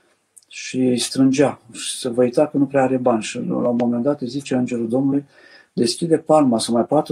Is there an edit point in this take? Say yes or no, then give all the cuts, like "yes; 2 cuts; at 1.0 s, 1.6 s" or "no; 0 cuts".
no; 0 cuts